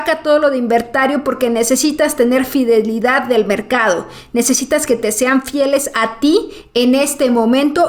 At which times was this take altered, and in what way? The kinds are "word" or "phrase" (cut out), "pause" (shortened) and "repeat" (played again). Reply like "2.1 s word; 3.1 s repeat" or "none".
none